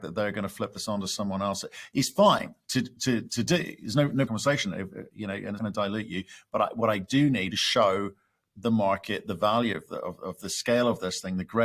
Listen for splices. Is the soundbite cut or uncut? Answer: cut